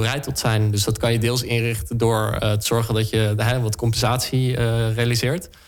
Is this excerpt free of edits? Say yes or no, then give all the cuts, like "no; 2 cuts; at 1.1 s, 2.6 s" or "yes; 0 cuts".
yes; 0 cuts